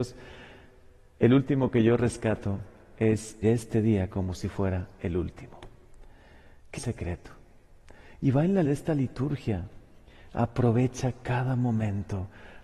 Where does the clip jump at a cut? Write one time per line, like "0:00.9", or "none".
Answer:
0:03.4
0:06.8
0:08.6